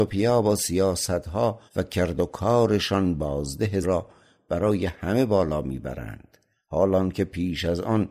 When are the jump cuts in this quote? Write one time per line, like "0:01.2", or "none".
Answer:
0:01.7
0:03.8

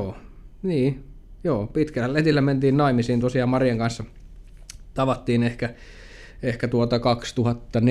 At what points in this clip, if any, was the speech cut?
none

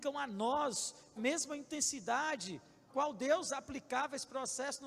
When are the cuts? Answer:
0:01.2
0:02.9

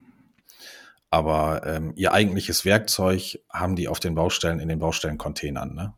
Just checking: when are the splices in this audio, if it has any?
none

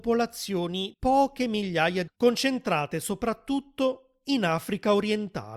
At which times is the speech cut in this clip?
0:00.9
0:02.1

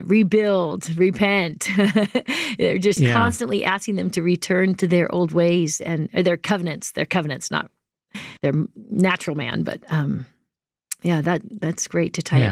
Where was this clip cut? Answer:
0:08.4

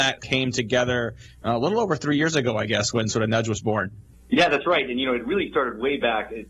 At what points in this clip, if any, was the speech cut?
none

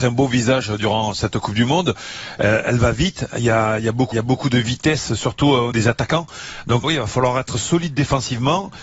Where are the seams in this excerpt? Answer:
0:04.1
0:05.7
0:06.8

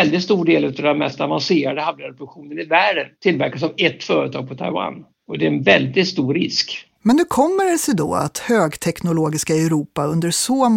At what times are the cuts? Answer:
0:03.1
0:05.1
0:06.9

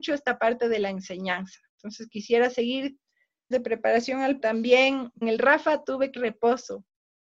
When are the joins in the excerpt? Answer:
0:01.7
0:03.5
0:04.4
0:05.2
0:06.2

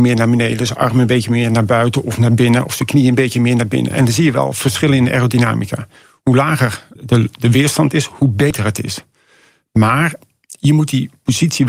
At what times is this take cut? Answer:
0:07.0

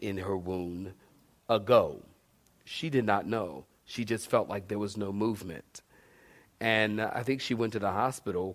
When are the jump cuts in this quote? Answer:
0:01.4

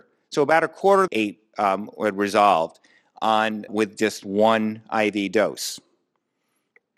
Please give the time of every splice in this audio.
0:01.1
0:03.7
0:04.2

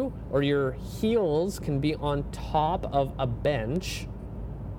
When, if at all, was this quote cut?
none

